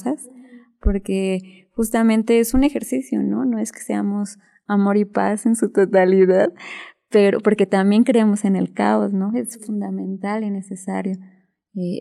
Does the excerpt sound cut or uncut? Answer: uncut